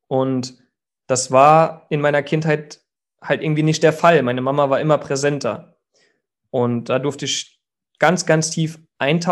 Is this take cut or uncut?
uncut